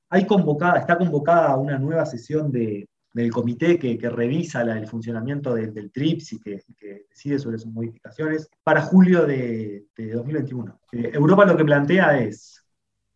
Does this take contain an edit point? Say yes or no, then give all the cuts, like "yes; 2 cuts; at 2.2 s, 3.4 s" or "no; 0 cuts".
yes; 4 cuts; at 3.0 s, 8.6 s, 9.9 s, 10.8 s